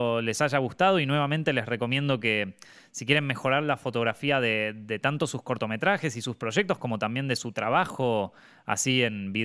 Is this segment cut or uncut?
uncut